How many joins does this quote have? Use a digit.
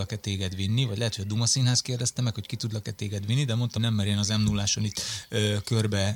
1